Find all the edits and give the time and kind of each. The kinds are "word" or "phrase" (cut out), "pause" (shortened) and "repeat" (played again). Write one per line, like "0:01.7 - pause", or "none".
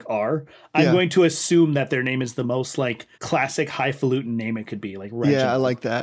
0:03.1 - pause